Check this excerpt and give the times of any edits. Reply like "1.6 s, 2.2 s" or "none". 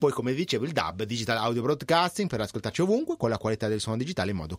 none